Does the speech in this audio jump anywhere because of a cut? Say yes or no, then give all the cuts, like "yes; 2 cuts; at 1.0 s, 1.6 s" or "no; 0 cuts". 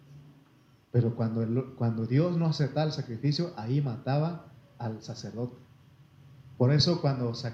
no; 0 cuts